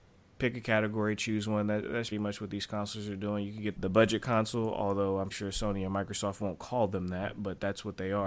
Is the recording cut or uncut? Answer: cut